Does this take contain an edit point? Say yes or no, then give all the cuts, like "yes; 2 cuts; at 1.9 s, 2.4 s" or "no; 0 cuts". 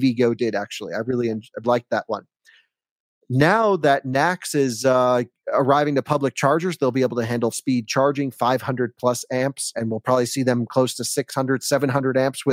yes; 3 cuts; at 1.6 s, 7.5 s, 9.7 s